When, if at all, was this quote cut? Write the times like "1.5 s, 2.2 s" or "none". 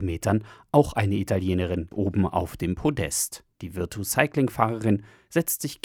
1.9 s, 3.5 s